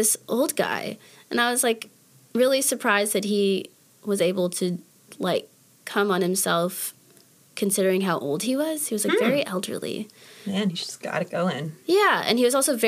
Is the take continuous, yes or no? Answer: yes